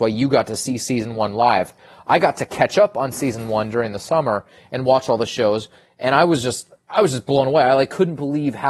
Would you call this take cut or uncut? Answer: uncut